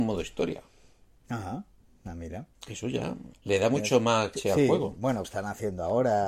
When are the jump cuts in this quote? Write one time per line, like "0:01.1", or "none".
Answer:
0:02.5
0:03.3
0:04.3
0:05.2